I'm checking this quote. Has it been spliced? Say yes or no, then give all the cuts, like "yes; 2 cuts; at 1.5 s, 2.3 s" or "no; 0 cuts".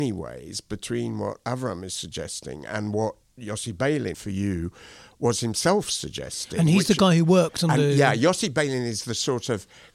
yes; 1 cut; at 4.1 s